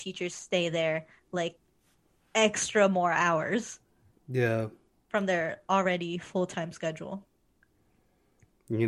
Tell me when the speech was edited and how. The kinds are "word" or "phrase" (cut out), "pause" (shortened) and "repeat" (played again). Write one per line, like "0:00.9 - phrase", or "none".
none